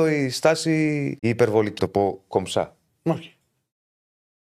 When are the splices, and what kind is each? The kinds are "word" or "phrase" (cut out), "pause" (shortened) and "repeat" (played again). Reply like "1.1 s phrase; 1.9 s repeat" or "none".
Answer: 1.2 s pause; 1.8 s word